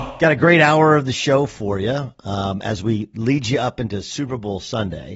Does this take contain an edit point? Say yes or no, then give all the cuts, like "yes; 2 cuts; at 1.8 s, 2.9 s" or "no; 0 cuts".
no; 0 cuts